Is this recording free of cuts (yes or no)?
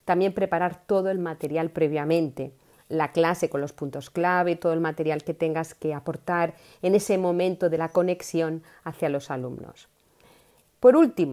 yes